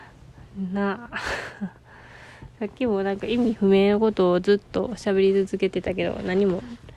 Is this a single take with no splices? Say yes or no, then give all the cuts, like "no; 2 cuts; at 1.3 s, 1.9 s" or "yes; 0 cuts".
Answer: no; 1 cut; at 1.8 s